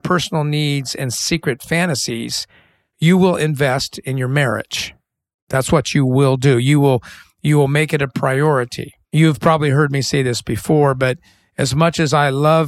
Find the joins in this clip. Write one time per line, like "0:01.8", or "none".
0:09.0